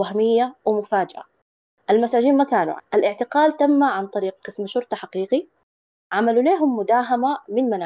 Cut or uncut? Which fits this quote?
cut